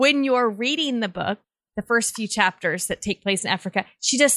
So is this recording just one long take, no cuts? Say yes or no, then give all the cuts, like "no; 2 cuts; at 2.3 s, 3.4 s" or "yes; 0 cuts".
yes; 0 cuts